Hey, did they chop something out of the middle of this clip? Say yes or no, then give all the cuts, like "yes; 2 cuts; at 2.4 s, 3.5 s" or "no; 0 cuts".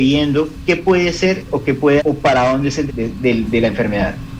yes; 2 cuts; at 2.0 s, 2.9 s